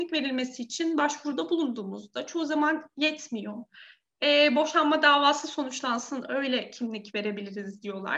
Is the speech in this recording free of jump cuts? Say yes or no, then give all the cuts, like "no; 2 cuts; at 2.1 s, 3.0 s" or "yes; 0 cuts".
yes; 0 cuts